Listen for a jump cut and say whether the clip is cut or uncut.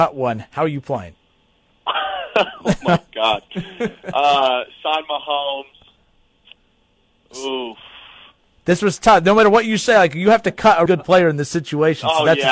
cut